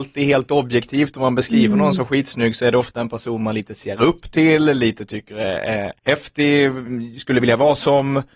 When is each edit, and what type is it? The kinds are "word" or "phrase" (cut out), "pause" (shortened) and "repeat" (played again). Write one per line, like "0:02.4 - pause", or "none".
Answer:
0:06.0 - pause